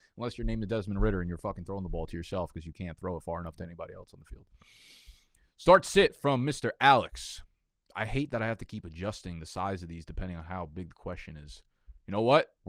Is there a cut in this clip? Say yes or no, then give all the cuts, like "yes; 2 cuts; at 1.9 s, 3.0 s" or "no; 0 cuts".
no; 0 cuts